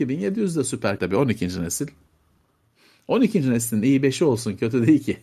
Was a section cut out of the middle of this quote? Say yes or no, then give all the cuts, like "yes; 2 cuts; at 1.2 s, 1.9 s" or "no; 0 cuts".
yes; 1 cut; at 1.0 s